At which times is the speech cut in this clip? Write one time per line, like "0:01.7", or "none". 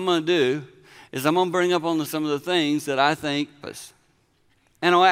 0:02.0
0:03.6